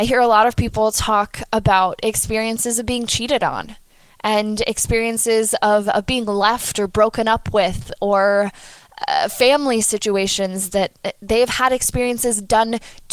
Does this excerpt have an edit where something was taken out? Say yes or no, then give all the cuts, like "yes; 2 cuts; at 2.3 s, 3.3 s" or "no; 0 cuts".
no; 0 cuts